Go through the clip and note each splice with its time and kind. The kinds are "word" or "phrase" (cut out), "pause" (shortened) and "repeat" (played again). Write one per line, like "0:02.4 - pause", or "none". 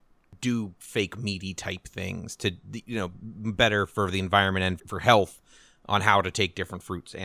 0:04.8 - word